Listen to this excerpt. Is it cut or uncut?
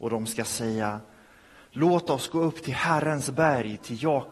uncut